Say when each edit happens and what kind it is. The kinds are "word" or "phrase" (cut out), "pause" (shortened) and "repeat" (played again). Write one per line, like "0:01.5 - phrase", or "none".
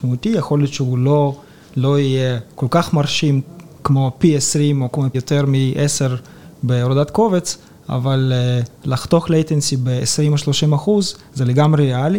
0:03.7 - pause
0:05.1 - word